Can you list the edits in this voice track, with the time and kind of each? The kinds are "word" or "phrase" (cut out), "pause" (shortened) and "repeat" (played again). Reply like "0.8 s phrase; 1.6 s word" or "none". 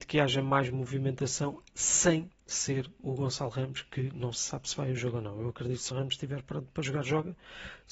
2.4 s pause; 5.9 s phrase